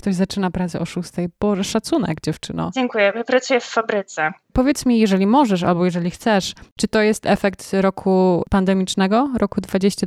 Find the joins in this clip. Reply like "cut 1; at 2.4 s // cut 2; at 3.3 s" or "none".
cut 1; at 4.4 s